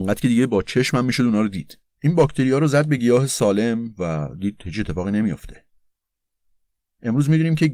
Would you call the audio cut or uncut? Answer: uncut